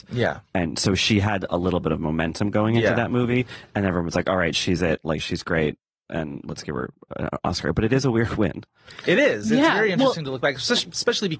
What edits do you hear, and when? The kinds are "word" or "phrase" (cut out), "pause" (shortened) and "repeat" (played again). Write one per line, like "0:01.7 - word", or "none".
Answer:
none